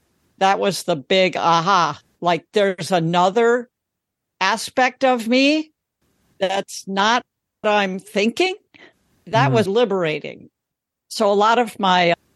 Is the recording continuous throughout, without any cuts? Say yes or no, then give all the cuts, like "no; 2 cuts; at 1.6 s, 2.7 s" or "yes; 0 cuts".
no; 2 cuts; at 7.6 s, 9.7 s